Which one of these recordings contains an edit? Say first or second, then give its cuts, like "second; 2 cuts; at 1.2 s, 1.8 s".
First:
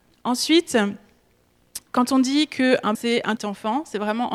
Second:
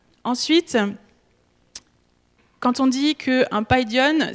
first; 3 cuts; at 1.9 s, 2.9 s, 3.4 s